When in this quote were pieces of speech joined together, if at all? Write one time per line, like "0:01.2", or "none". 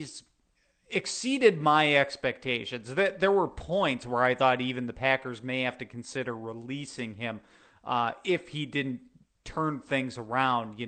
none